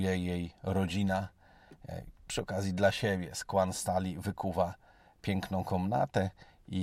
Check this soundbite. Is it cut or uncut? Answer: uncut